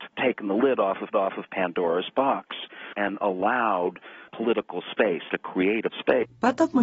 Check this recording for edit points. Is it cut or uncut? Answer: cut